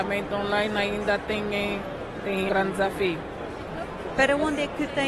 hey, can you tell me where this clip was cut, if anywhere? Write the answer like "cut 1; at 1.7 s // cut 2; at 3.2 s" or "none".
cut 1; at 2.5 s